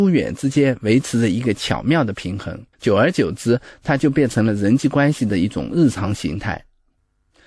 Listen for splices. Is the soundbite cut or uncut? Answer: cut